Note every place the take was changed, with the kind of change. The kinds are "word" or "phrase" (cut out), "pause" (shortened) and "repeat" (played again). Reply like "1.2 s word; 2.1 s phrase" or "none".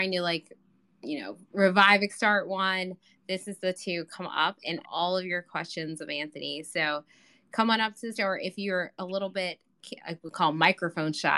2.1 s word; 3.7 s word; 4.8 s word; 8.1 s word; 10.0 s word

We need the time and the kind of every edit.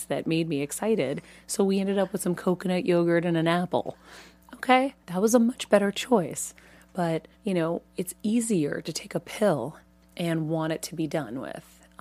5.0 s pause; 7.3 s pause

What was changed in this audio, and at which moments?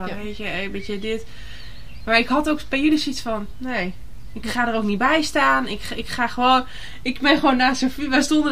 none

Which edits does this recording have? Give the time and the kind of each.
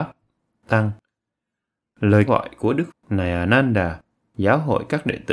2.3 s word; 2.9 s word

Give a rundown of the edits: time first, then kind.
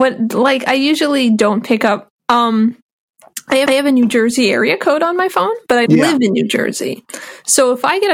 2.2 s pause; 3.7 s repeat; 5.9 s word

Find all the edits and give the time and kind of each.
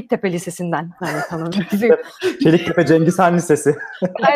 none

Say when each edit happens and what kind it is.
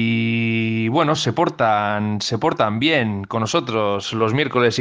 none

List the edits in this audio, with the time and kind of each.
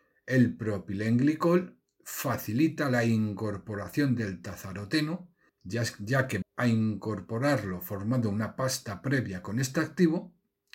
5.5 s pause; 6.4 s word

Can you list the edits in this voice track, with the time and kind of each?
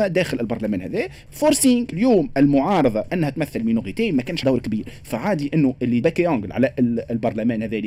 1.9 s word; 3.1 s word; 4.4 s word; 6.0 s word

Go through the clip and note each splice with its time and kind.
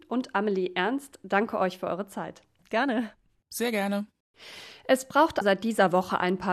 5.4 s word

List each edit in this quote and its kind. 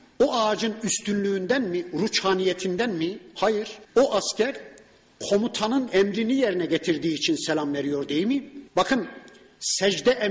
3.8 s pause; 8.7 s pause

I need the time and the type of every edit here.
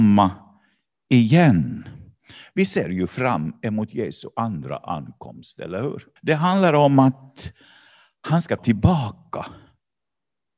6.2 s pause; 8.6 s word

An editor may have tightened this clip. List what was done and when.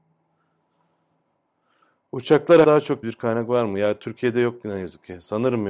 2.6 s word; 3.0 s phrase

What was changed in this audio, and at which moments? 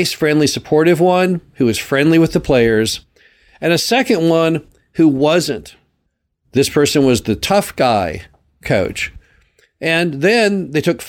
none

